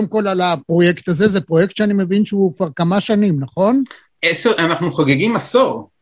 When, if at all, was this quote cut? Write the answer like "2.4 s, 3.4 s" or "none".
none